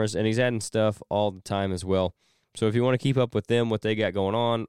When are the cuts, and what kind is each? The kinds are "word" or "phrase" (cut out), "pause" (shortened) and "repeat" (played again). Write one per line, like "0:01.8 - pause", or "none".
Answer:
none